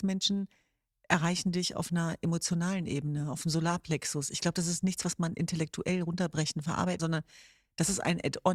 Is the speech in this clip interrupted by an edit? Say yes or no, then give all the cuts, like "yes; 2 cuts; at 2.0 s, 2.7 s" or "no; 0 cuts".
yes; 1 cut; at 7.0 s